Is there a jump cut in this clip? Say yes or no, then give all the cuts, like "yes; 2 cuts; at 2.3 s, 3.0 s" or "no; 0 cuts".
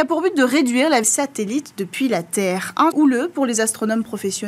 yes; 2 cuts; at 1.0 s, 2.9 s